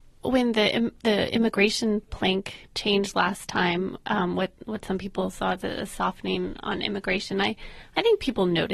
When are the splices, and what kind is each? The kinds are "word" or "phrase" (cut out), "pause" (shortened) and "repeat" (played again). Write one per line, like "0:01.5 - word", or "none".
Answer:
none